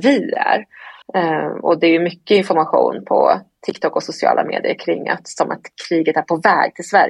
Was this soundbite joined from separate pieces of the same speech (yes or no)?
yes